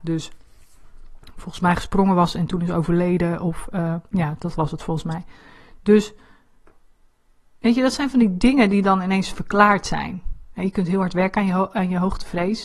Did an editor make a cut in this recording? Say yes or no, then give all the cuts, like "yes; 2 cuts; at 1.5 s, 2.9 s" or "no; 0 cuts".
no; 0 cuts